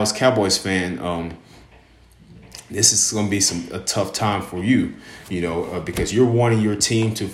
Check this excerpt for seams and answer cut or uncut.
uncut